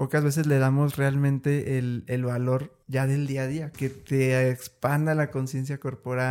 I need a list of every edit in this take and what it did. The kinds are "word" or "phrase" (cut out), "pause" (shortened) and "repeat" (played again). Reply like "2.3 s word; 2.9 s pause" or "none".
2.8 s pause; 3.7 s phrase